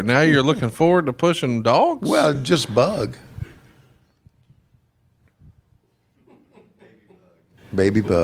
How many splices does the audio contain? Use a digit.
0